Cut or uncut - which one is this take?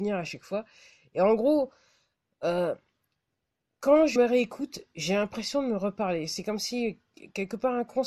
cut